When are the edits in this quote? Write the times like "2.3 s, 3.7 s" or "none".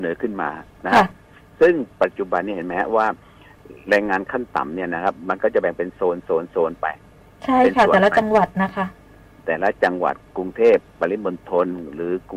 none